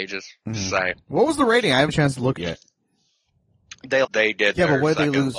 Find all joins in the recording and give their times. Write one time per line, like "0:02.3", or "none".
0:01.9
0:02.4
0:04.0